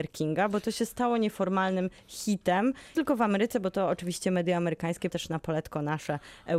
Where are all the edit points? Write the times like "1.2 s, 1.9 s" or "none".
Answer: 2.9 s, 5.1 s